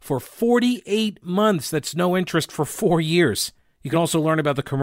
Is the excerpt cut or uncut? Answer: uncut